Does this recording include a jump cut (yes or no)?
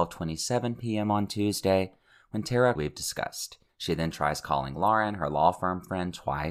yes